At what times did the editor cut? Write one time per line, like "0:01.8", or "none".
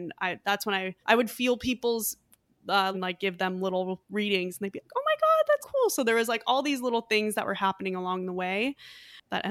0:01.0
0:02.9
0:05.6